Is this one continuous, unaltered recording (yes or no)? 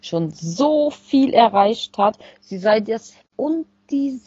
no